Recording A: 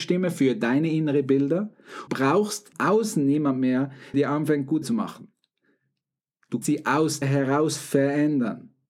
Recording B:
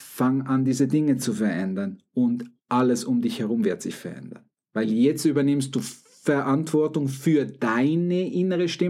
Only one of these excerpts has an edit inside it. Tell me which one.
A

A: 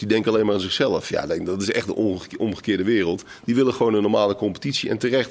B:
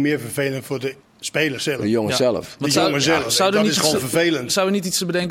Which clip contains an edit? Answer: B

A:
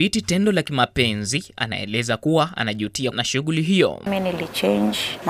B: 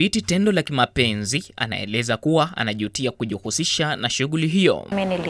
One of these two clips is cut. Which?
A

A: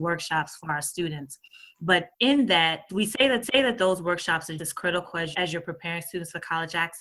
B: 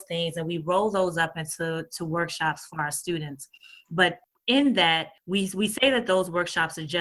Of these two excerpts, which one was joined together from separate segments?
A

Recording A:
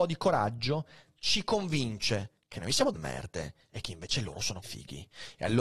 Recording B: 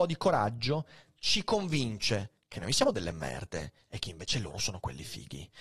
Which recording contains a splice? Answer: A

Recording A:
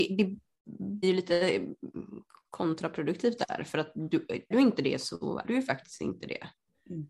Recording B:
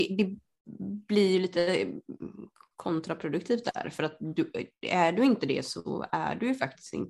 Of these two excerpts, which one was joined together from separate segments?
A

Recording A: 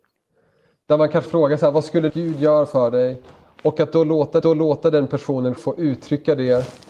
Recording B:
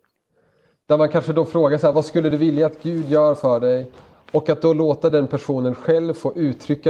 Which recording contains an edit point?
A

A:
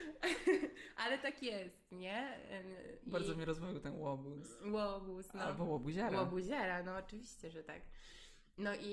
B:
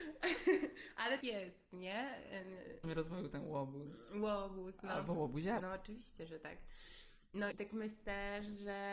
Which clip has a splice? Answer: B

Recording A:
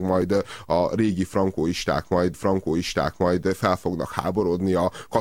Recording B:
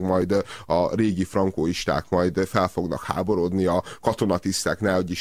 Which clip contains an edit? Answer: A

